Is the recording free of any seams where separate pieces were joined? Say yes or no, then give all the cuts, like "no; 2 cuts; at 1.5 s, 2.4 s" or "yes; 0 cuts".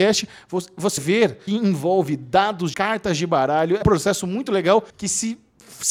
no; 5 cuts; at 1.0 s, 1.5 s, 2.7 s, 3.8 s, 4.9 s